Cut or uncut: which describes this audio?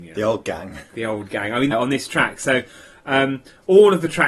cut